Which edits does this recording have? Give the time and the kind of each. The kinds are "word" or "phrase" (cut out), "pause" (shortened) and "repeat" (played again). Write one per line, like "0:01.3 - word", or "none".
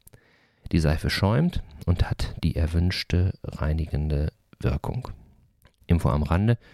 none